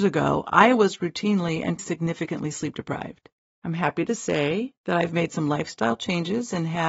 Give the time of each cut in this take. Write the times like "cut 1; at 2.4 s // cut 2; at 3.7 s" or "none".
cut 1; at 1.8 s // cut 2; at 3.5 s // cut 3; at 4.8 s